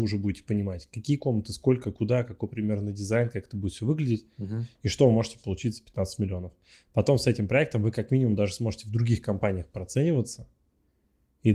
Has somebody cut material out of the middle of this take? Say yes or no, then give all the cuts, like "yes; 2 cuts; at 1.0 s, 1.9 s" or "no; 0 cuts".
no; 0 cuts